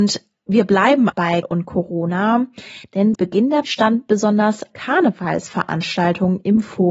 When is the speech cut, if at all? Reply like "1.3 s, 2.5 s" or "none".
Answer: 1.1 s, 1.4 s, 3.1 s, 3.6 s, 4.7 s